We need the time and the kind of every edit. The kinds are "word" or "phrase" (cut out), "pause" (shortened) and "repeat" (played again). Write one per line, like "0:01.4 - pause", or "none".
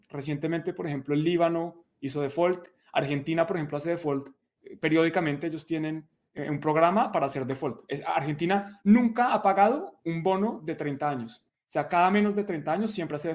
none